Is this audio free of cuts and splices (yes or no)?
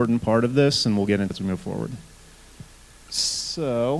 no